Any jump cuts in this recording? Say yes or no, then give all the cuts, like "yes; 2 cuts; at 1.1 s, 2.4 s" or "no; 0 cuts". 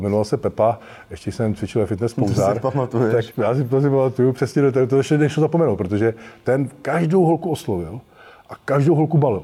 yes; 1 cut; at 3.3 s